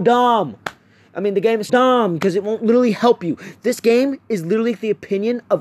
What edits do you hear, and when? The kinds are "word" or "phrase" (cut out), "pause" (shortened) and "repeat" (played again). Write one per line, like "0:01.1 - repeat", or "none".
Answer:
0:01.7 - word

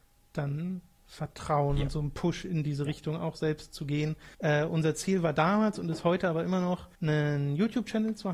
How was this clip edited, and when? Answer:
0:04.3 - pause
0:06.9 - pause

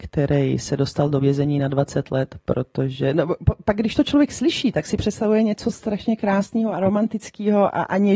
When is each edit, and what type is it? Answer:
none

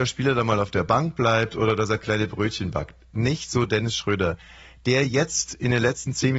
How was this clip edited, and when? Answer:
none

